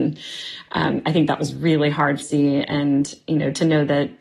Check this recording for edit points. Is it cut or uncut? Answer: cut